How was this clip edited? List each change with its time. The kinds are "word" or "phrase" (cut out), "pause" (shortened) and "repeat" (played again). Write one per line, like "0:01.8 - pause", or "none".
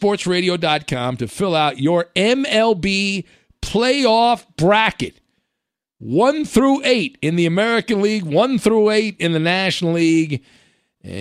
none